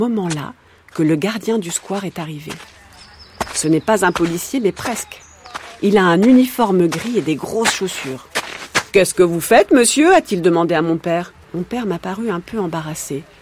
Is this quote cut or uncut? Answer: cut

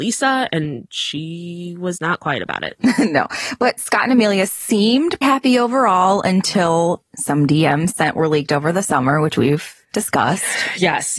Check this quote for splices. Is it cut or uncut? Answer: cut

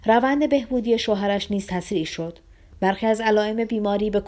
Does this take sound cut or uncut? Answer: uncut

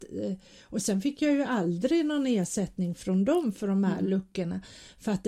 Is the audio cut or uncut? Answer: uncut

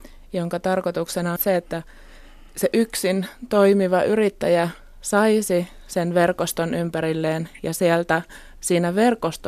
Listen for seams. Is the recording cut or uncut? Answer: cut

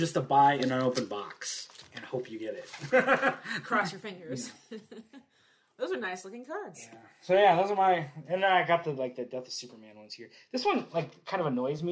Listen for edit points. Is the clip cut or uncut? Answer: uncut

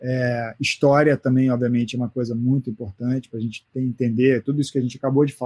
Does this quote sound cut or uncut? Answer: uncut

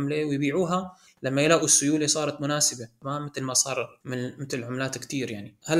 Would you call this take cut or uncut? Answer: uncut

